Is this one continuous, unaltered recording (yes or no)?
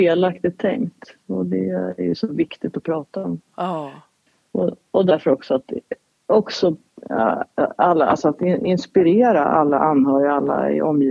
yes